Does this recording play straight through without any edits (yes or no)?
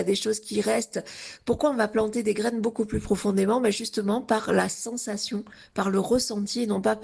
yes